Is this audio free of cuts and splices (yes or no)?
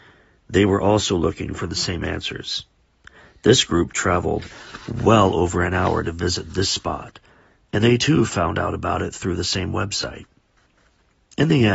yes